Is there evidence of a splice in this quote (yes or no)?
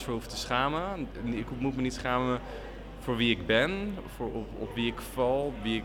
no